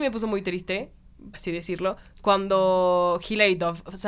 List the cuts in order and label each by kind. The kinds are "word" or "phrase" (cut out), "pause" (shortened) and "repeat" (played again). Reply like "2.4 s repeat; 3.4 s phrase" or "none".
1.3 s word